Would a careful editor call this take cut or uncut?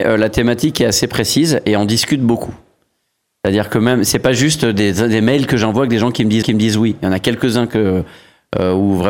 cut